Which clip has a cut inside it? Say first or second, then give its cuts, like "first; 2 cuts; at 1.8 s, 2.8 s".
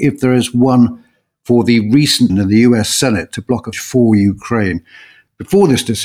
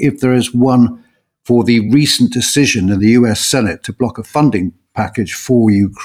first; 2 cuts; at 2.3 s, 3.7 s